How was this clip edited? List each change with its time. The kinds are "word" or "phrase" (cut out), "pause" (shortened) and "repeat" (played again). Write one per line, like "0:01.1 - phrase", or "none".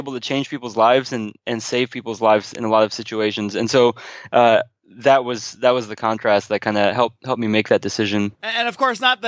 none